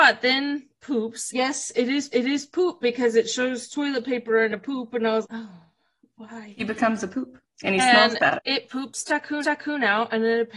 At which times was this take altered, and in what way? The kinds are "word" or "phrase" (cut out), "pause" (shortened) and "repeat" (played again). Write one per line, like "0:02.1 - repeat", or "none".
0:01.3 - word
0:02.1 - repeat
0:05.2 - word
0:08.4 - word
0:09.4 - repeat